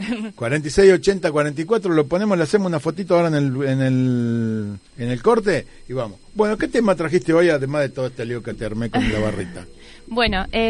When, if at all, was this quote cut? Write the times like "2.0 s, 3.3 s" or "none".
4.9 s